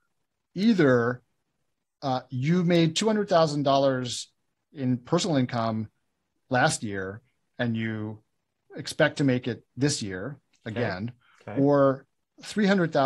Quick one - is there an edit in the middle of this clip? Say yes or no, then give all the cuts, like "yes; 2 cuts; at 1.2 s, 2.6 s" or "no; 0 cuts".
no; 0 cuts